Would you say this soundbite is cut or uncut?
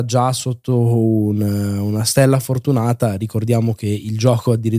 uncut